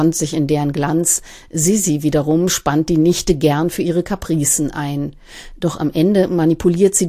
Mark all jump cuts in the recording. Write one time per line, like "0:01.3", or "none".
none